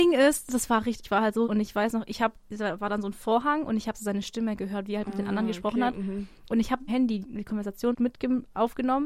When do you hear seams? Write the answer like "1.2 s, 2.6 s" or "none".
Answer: 1.0 s, 1.4 s, 6.9 s, 7.2 s, 7.9 s

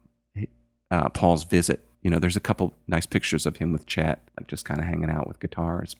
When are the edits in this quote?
1.9 s, 4.3 s

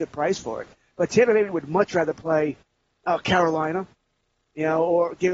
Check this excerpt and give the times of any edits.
none

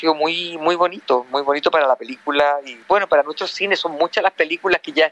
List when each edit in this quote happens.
2.8 s

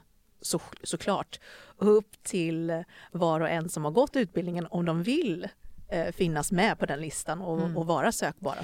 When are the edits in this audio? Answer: none

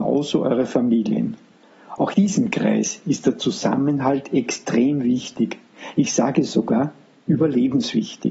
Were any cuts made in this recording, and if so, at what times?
2.1 s

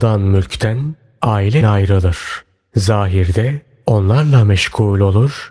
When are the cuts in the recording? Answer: 1.6 s

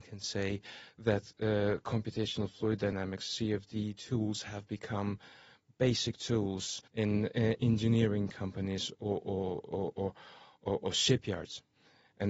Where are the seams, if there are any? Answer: 6.9 s, 9.9 s

